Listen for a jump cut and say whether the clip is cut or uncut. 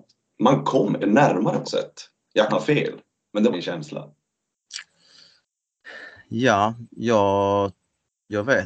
cut